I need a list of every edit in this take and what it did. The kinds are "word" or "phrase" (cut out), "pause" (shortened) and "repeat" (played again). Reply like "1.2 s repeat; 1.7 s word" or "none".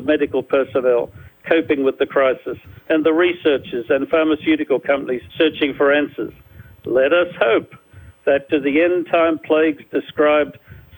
5.3 s pause; 8.5 s word